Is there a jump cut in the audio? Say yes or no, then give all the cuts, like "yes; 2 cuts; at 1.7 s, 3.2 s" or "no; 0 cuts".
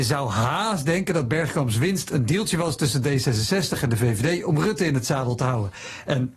no; 0 cuts